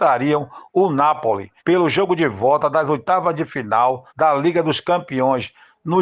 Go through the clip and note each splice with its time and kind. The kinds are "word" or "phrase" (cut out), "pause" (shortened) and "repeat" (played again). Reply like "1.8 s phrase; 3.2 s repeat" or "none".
1.6 s pause; 4.1 s pause